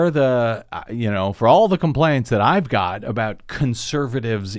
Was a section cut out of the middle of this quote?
no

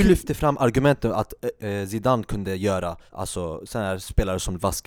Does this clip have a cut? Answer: yes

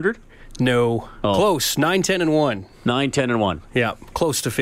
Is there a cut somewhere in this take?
no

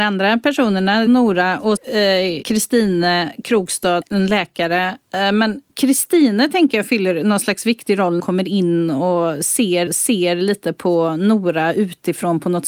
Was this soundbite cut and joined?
yes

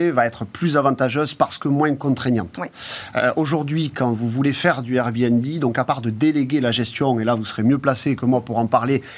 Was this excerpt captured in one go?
yes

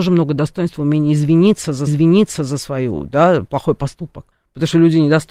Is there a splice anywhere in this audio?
yes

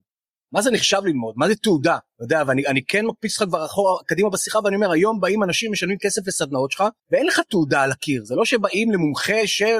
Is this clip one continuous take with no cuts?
no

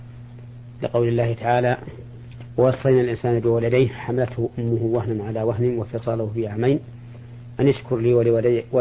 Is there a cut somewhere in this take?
no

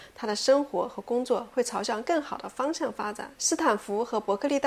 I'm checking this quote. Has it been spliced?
yes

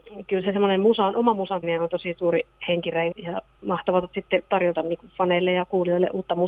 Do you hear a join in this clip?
yes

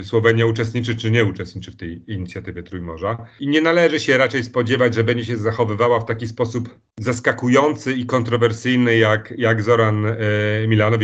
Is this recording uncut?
yes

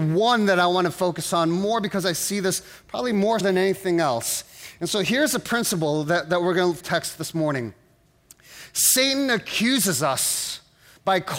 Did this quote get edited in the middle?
yes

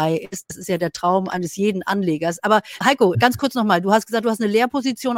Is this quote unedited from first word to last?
no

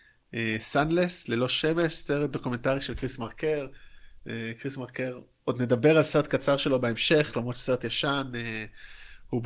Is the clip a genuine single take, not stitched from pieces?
yes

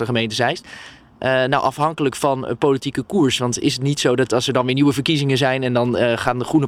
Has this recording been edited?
no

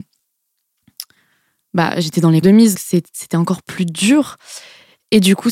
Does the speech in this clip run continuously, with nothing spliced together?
no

